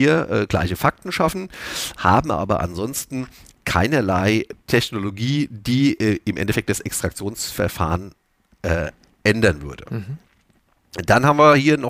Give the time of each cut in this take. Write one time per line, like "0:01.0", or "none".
none